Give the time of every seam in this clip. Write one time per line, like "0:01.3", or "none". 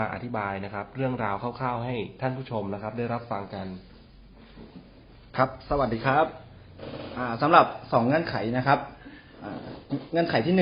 none